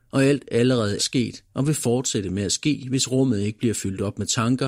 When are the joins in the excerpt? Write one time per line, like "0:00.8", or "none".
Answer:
0:01.0